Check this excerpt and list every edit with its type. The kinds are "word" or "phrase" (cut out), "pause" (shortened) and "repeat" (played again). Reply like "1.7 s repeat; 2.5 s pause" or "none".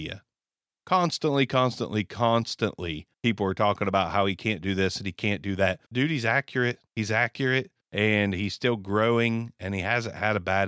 3.1 s pause; 5.9 s pause; 6.9 s pause; 7.8 s pause